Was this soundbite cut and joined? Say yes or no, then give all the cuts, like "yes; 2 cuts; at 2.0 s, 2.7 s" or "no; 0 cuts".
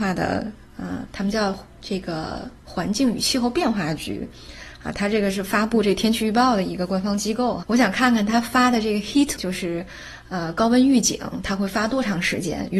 yes; 3 cuts; at 1.7 s, 7.6 s, 9.4 s